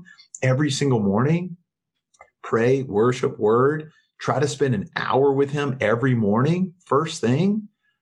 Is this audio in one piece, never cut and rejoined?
yes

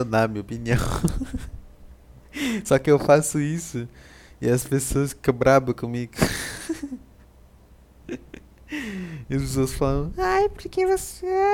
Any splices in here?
no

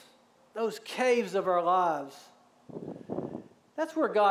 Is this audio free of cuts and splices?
yes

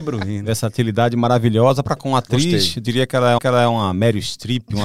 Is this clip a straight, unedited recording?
no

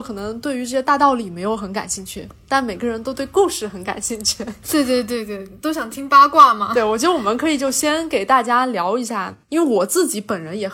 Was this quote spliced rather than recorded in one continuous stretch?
yes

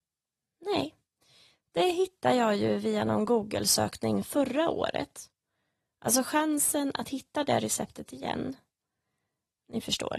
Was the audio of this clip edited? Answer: no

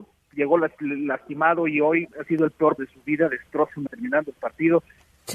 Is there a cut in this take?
yes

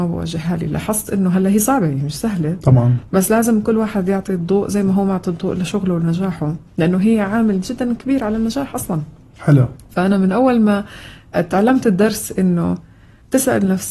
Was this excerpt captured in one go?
no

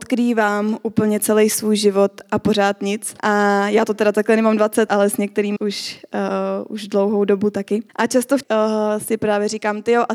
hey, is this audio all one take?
no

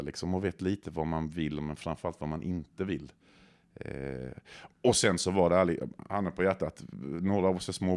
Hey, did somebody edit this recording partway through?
no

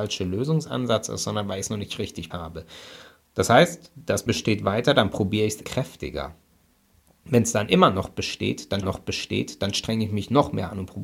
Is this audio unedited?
no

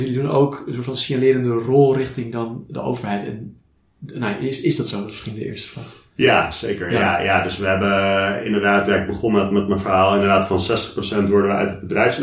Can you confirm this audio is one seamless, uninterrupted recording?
no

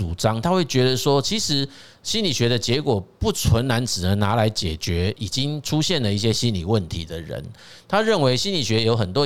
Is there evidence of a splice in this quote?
no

